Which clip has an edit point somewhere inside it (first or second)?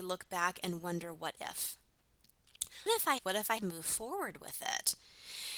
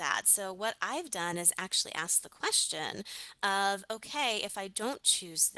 first